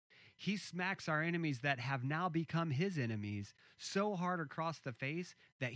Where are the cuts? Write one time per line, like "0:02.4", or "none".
none